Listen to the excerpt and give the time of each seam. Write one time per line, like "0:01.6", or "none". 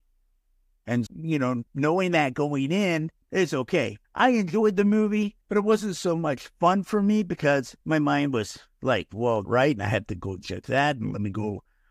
0:01.1
0:01.7
0:03.2
0:04.0
0:05.4
0:07.8
0:09.5